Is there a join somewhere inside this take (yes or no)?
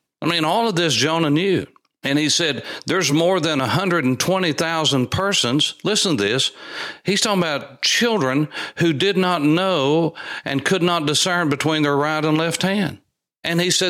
no